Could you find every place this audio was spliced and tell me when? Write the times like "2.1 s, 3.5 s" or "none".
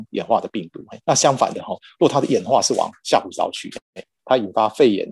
1.0 s